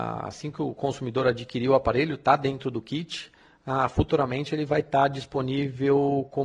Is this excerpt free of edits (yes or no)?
yes